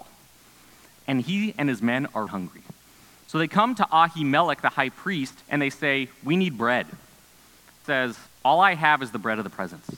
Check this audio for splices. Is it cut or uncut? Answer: cut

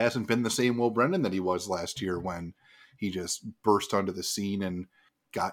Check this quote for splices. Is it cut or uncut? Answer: uncut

